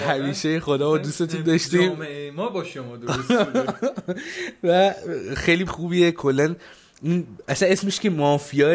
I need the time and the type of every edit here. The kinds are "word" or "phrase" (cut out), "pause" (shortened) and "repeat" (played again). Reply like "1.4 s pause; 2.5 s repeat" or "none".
5.7 s word